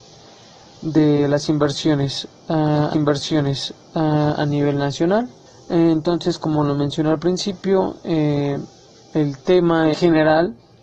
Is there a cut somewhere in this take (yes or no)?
yes